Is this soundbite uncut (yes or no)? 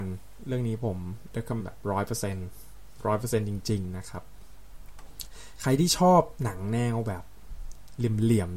no